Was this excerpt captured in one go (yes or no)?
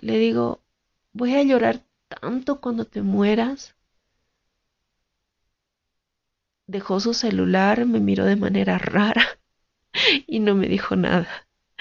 yes